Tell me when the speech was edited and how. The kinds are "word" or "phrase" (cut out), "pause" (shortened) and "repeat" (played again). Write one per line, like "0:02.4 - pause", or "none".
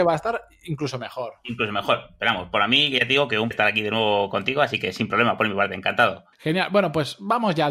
0:03.5 - word
0:06.3 - pause